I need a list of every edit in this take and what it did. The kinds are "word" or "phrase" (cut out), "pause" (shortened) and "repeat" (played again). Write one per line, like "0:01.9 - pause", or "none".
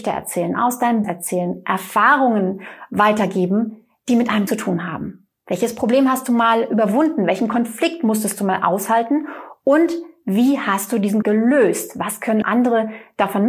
0:01.0 - word
0:04.5 - word
0:11.2 - word
0:12.4 - word